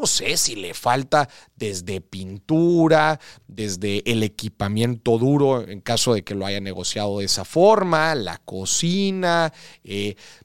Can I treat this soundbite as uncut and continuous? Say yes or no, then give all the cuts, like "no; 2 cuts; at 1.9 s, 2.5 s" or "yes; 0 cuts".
yes; 0 cuts